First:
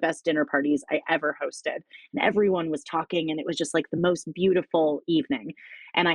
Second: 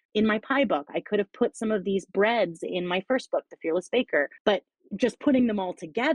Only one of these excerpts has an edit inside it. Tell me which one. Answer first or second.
second